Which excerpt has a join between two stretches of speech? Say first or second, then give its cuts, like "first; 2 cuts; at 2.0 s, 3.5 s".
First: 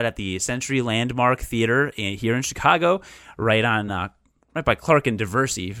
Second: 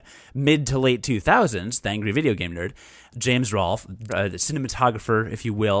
second; 1 cut; at 4.1 s